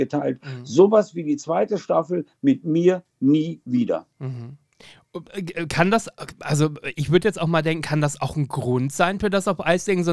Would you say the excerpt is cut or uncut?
uncut